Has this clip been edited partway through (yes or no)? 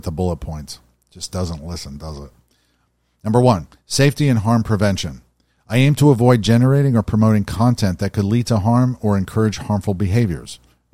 no